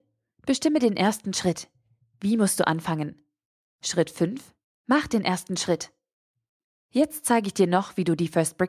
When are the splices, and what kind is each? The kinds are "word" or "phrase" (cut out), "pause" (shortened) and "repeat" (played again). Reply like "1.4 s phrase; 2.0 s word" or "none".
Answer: none